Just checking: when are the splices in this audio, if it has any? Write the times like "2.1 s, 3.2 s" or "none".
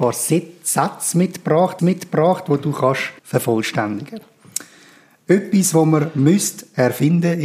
1.8 s, 3.2 s

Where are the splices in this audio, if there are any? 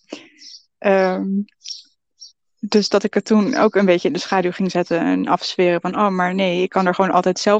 none

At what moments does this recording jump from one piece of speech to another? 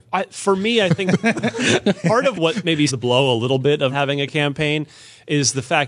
2.3 s, 2.9 s, 3.9 s

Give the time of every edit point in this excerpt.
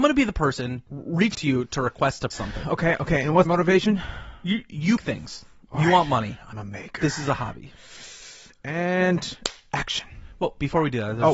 1.3 s, 2.3 s, 3.5 s, 5.0 s, 6.5 s

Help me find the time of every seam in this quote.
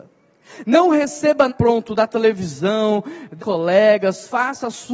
1.5 s, 3.4 s

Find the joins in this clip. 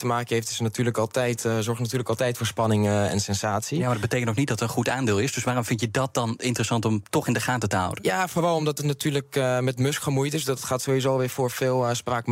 none

